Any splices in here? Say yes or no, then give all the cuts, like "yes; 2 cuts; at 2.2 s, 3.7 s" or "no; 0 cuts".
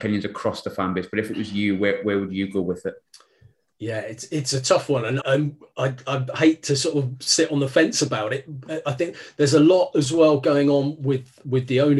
yes; 1 cut; at 5.2 s